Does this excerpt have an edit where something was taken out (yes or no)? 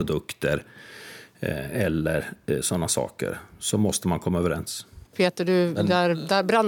yes